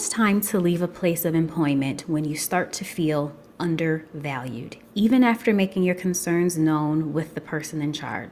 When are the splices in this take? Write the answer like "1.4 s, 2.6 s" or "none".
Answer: 4.8 s